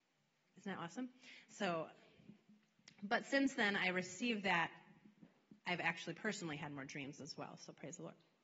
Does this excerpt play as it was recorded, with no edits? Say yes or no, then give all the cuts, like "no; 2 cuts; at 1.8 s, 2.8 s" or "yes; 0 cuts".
yes; 0 cuts